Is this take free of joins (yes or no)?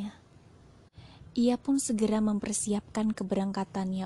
yes